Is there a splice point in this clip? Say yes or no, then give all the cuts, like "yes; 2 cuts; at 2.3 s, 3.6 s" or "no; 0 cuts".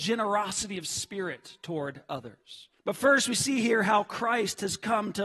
yes; 1 cut; at 2.8 s